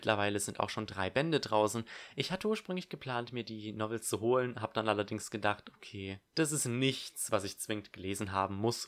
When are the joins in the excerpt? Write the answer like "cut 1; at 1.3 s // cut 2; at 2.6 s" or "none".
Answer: cut 1; at 6.3 s